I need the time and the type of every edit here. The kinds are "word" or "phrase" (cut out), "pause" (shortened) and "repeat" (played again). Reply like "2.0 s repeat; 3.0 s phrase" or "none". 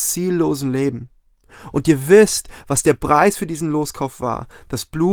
none